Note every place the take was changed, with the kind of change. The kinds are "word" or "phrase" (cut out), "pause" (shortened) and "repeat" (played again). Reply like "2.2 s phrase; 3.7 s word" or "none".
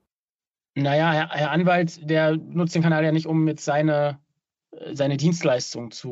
none